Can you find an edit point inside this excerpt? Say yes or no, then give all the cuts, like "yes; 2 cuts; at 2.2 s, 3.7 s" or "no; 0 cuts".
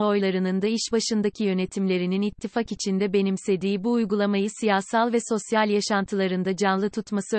no; 0 cuts